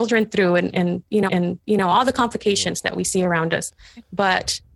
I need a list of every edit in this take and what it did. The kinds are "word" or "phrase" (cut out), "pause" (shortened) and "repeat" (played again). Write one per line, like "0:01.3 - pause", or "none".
0:01.3 - repeat